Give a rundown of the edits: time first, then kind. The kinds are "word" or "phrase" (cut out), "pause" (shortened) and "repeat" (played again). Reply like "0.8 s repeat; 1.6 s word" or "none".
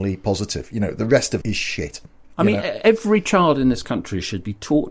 1.4 s word